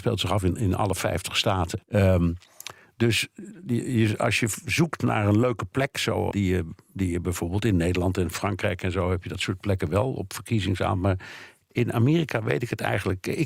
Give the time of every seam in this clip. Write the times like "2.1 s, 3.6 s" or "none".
1.8 s, 6.3 s